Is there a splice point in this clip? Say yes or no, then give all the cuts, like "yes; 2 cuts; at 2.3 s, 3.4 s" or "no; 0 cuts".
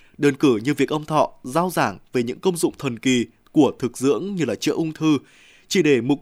no; 0 cuts